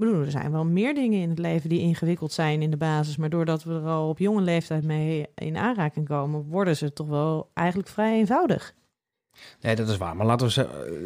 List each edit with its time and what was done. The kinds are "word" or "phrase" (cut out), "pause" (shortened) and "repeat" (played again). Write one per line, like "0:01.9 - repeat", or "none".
none